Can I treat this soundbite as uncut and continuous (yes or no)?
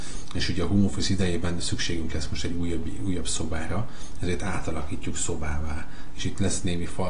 yes